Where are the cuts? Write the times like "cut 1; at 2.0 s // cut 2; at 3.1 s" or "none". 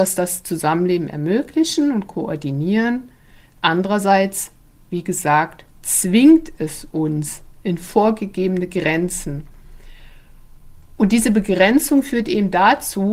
none